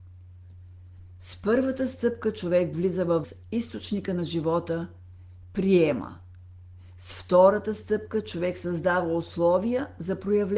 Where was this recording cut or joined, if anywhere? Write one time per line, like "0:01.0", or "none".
0:03.2